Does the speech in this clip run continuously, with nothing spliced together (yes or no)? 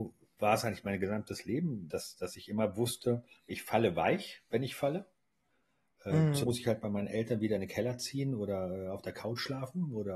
no